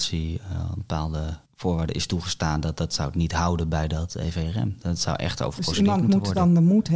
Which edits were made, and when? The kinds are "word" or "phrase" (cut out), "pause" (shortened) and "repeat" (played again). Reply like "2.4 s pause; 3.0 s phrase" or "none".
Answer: 1.5 s pause